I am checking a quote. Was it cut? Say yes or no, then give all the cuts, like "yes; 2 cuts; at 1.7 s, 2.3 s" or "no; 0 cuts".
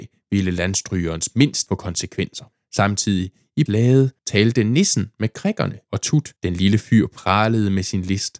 yes; 6 cuts; at 1.7 s, 2.5 s, 3.7 s, 4.2 s, 5.8 s, 6.4 s